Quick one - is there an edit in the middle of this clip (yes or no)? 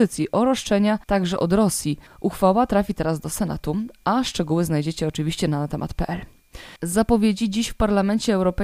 yes